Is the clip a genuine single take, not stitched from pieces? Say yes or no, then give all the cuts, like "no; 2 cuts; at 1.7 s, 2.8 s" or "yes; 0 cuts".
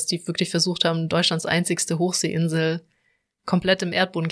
yes; 0 cuts